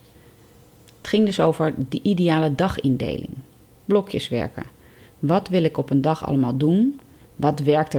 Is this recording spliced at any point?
no; 0 cuts

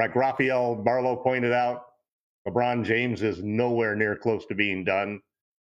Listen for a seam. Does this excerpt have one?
no; 0 cuts

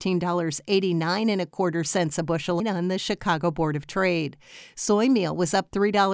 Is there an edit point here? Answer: yes; 1 cut; at 2.6 s

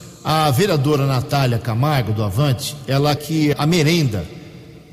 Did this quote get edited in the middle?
yes; 2 cuts; at 3.2 s, 3.5 s

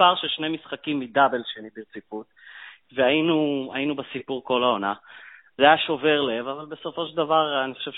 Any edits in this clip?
no; 0 cuts

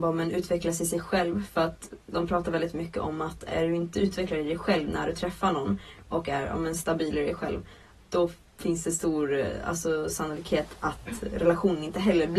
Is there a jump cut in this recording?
no; 0 cuts

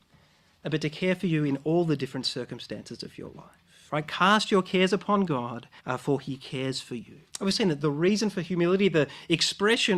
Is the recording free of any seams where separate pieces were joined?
no; 2 cuts; at 5.8 s, 7.3 s

